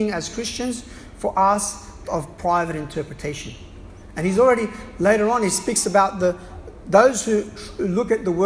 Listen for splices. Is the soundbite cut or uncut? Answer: cut